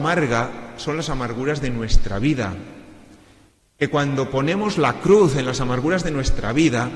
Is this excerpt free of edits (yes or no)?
yes